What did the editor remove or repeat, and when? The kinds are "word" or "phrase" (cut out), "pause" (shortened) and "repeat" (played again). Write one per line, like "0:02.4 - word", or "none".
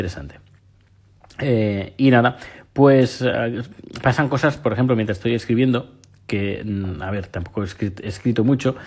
none